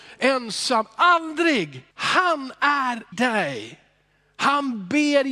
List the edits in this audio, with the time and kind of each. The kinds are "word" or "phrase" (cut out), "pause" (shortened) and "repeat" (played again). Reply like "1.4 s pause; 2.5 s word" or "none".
1.9 s pause; 3.1 s word